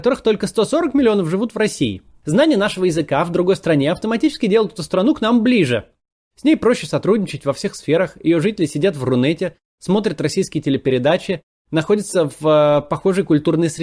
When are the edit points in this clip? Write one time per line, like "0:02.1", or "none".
none